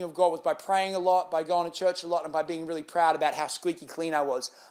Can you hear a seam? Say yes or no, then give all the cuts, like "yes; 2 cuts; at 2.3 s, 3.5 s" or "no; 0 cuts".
no; 0 cuts